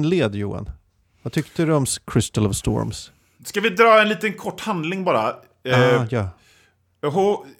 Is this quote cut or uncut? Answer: uncut